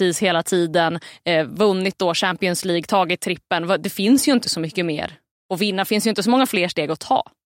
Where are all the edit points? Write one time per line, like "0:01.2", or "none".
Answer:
none

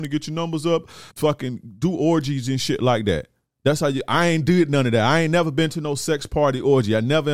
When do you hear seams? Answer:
0:01.1

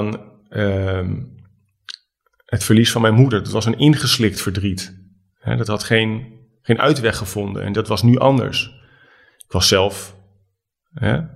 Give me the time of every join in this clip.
none

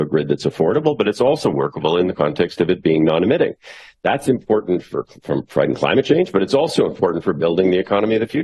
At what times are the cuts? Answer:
none

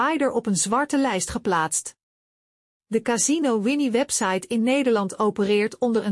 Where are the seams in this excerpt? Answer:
none

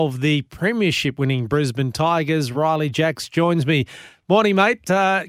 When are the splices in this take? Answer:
none

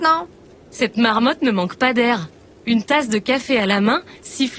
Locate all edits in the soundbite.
none

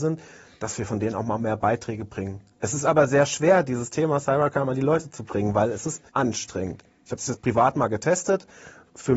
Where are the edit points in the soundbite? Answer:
0:06.1

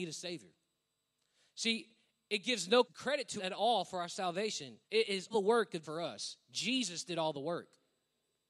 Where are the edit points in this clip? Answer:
0:01.0
0:02.8
0:03.4
0:04.8
0:05.3
0:05.8

